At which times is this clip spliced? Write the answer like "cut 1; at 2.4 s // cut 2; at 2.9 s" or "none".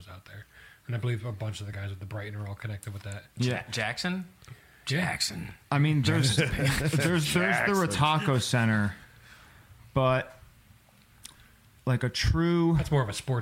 none